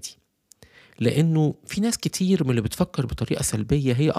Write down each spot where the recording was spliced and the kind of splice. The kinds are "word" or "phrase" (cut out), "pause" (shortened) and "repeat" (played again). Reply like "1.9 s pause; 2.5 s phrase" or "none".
none